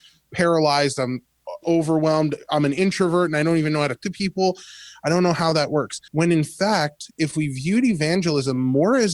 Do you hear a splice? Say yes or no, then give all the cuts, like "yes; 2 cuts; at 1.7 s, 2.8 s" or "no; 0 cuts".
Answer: yes; 3 cuts; at 1.6 s, 4.0 s, 6.1 s